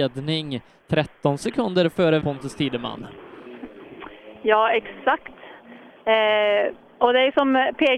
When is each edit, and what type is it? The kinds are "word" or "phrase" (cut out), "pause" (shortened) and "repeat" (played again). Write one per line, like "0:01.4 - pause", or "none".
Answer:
0:02.2 - word